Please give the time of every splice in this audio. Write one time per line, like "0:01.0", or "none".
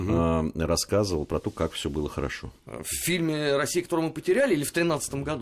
0:02.6